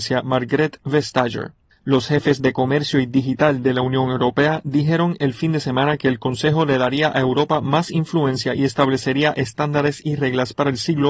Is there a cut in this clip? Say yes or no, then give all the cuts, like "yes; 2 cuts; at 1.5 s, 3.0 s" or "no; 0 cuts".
no; 0 cuts